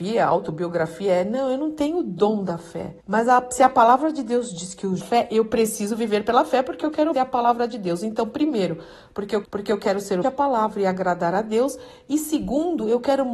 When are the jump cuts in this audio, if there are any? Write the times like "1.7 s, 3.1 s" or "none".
3.0 s, 5.0 s, 7.1 s, 9.4 s, 10.2 s